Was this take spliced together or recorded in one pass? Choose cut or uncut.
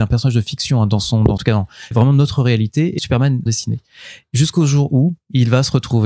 cut